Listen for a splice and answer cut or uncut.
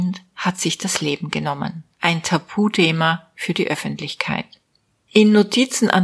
cut